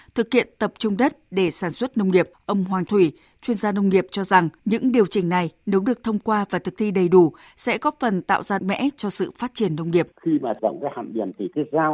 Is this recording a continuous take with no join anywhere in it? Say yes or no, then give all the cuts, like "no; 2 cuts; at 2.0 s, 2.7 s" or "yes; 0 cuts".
no; 6 cuts; at 2.3 s, 2.9 s, 4.6 s, 8.6 s, 10.1 s, 10.6 s